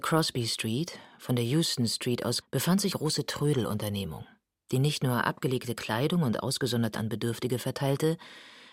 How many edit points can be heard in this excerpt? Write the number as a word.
three